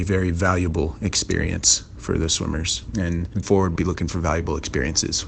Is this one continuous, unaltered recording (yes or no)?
no